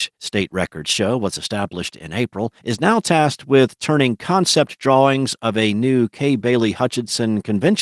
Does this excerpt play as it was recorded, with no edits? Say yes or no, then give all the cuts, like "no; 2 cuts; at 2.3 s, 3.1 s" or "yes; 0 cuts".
no; 1 cut; at 2.6 s